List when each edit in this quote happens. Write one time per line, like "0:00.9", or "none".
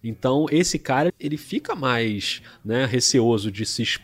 0:01.1